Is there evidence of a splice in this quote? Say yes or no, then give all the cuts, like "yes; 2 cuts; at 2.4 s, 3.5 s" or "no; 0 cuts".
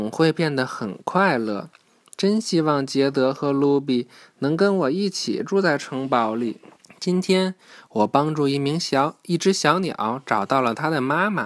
yes; 1 cut; at 6.8 s